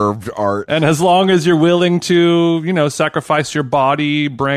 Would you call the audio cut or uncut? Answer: uncut